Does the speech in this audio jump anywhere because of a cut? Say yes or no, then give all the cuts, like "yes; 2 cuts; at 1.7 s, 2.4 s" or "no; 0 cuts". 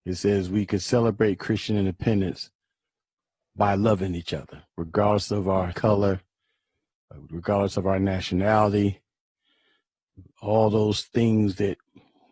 yes; 2 cuts; at 4.7 s, 5.7 s